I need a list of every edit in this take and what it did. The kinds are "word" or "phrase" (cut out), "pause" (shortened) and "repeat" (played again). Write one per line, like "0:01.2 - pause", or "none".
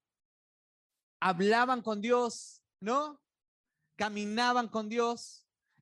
none